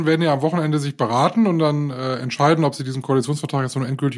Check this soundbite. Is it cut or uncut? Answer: uncut